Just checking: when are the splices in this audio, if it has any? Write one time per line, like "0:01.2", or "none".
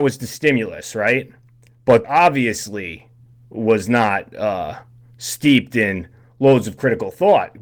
0:02.0